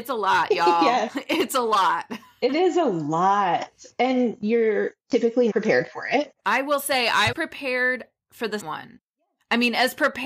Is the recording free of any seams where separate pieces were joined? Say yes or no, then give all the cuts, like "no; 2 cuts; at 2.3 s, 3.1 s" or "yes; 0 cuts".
no; 4 cuts; at 5.5 s, 6.4 s, 7.3 s, 8.6 s